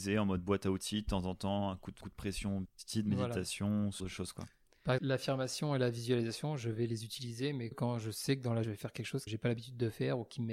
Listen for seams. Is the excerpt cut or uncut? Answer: cut